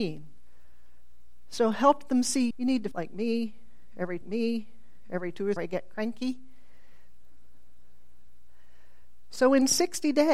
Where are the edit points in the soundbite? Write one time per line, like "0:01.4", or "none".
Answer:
0:02.5
0:02.9
0:04.2
0:05.6